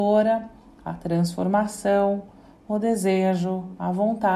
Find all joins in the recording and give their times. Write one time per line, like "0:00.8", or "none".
none